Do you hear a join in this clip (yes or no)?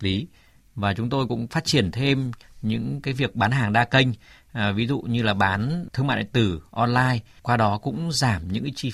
no